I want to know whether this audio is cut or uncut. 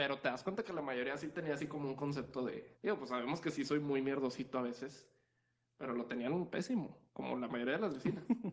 cut